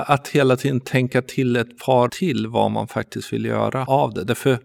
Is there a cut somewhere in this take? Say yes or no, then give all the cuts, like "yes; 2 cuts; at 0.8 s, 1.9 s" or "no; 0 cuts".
yes; 1 cut; at 2.1 s